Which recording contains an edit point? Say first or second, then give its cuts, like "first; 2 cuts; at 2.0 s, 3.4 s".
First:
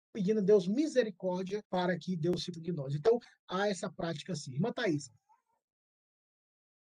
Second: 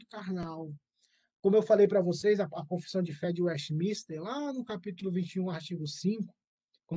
first; 2 cuts; at 1.6 s, 2.5 s